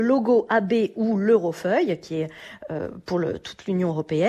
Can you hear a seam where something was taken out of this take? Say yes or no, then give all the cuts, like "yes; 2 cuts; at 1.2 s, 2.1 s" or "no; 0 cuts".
no; 0 cuts